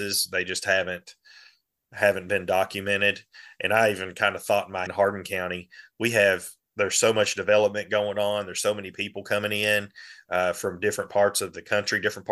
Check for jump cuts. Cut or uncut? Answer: cut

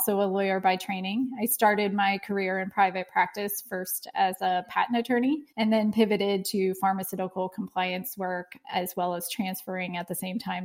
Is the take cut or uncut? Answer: cut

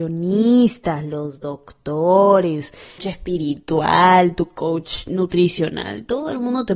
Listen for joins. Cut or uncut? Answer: cut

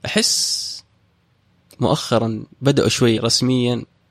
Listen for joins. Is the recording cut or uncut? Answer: cut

